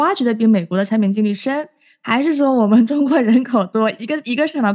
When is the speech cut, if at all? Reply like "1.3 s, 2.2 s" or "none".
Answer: none